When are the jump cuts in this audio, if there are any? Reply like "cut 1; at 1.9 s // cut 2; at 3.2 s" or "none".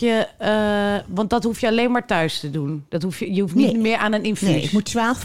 none